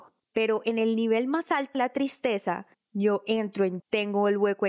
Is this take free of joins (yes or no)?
no